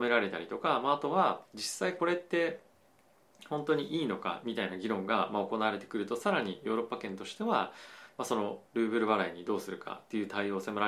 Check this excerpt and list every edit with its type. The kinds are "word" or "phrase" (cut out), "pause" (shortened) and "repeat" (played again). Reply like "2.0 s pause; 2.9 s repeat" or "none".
1.5 s pause; 8.7 s pause